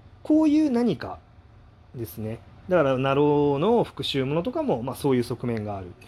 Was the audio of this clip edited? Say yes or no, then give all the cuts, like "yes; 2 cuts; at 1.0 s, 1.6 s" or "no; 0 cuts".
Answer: no; 0 cuts